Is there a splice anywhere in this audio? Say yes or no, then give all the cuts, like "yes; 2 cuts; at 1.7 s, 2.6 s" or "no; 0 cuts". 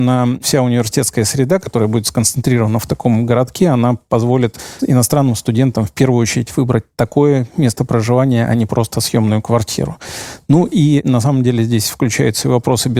no; 0 cuts